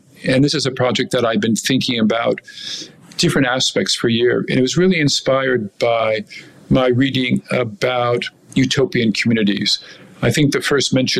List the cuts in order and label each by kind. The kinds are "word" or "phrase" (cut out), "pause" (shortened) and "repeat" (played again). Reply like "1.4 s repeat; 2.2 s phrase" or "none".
none